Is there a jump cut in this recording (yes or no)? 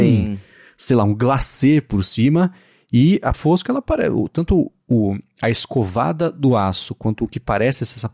yes